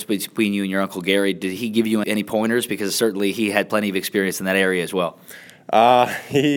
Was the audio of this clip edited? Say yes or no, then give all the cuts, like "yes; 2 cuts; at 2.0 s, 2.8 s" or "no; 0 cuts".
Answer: yes; 1 cut; at 2.0 s